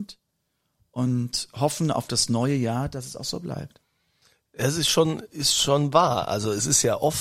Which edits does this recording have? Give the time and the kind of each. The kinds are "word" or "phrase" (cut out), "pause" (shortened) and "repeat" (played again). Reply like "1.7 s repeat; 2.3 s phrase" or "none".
4.2 s pause